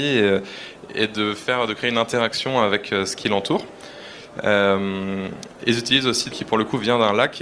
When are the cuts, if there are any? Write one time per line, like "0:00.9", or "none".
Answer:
0:06.3